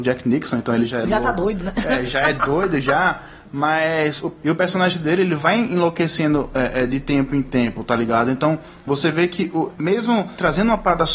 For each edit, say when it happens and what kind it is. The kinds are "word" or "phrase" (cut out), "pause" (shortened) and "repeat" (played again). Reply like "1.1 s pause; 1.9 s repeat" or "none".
none

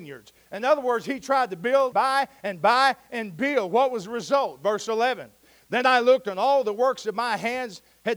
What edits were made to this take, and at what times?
1.9 s word

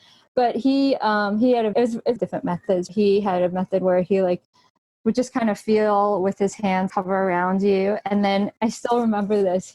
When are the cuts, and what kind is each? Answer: 1.7 s word; 2.2 s phrase; 2.9 s word; 6.9 s word

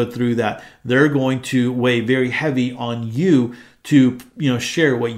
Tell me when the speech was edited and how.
none

